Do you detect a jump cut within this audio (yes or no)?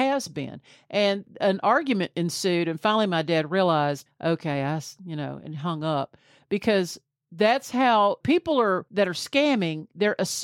no